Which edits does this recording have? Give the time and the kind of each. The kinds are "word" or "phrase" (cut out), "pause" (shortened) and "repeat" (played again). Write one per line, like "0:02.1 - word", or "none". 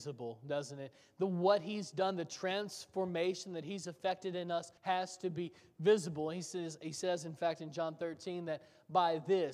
0:04.8 - pause